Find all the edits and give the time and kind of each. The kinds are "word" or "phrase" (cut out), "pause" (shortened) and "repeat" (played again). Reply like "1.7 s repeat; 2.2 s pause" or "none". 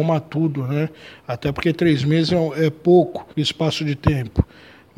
3.3 s pause